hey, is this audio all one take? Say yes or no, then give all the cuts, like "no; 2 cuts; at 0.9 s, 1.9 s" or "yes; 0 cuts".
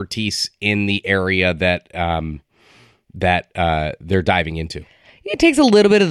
yes; 0 cuts